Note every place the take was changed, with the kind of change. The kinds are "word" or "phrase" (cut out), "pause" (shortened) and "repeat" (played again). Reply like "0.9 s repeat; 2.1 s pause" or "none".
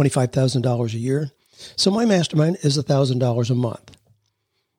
none

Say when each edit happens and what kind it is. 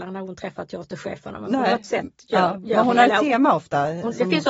none

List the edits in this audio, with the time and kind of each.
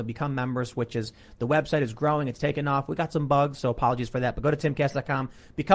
none

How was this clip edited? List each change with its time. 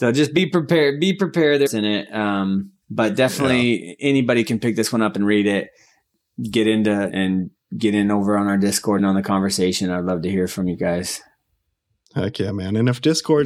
1.7 s phrase; 2.8 s pause; 7.1 s phrase; 9.0 s phrase

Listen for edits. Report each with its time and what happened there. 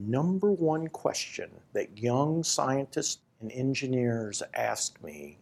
3.3 s pause

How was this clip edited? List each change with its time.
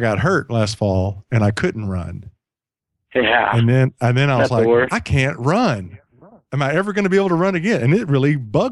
none

